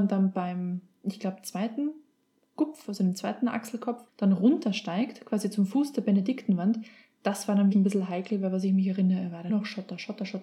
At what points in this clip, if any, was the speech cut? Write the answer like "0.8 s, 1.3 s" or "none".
4.1 s, 7.7 s, 9.5 s